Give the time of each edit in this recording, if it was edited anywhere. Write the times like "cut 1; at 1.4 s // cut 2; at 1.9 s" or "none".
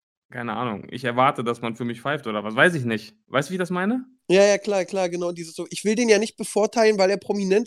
cut 1; at 3.2 s

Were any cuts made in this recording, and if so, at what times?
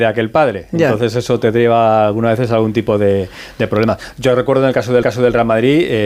cut 1; at 5.0 s

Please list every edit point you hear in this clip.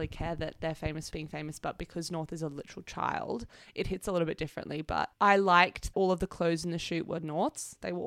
cut 1; at 1.1 s // cut 2; at 5.1 s // cut 3; at 5.9 s

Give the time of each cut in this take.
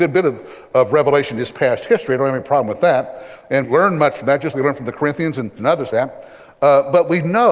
cut 1; at 3.6 s // cut 2; at 4.5 s // cut 3; at 5.6 s // cut 4; at 5.9 s

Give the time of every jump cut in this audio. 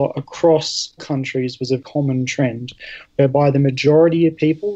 cut 1; at 1.0 s // cut 2; at 1.8 s

